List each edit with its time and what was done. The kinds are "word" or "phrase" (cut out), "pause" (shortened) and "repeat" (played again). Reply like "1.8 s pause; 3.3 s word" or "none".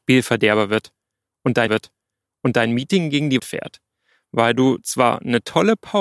1.7 s repeat; 3.4 s word